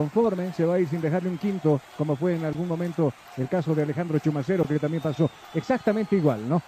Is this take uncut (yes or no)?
yes